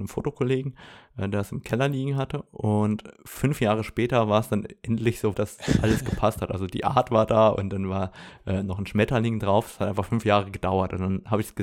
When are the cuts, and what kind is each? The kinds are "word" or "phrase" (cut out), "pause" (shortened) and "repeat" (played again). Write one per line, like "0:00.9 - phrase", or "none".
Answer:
0:05.3 - word